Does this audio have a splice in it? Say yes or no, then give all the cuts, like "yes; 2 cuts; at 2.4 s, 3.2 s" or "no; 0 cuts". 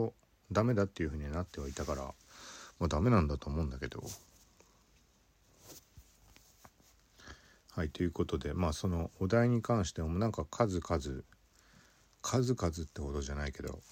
no; 0 cuts